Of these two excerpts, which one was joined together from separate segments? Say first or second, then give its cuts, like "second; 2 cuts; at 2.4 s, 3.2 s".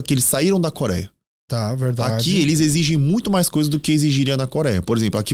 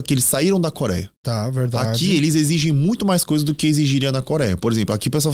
second; 1 cut; at 1.2 s